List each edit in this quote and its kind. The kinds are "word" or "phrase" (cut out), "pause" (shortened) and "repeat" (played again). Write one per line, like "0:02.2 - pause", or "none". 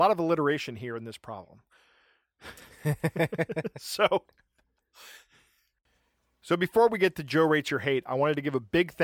none